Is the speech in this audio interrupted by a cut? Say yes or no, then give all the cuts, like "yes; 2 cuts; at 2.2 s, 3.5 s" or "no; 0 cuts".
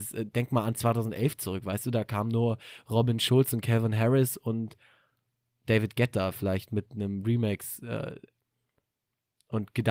no; 0 cuts